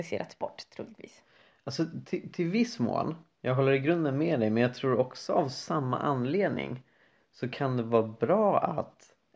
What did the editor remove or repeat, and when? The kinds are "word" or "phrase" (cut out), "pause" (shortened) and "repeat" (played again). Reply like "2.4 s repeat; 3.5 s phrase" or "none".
none